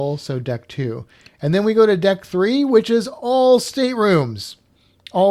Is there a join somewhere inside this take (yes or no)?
no